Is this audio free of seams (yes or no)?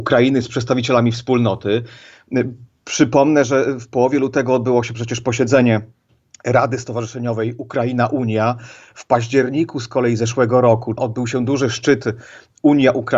yes